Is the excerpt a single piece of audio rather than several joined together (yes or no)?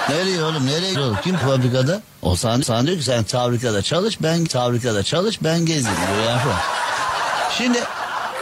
no